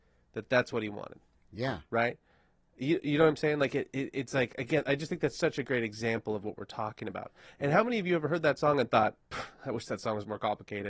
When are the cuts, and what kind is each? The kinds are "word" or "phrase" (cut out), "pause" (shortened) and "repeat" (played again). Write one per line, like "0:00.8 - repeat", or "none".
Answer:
none